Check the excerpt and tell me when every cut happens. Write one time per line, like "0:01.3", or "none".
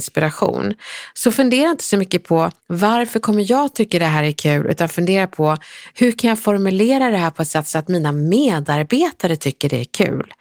0:02.6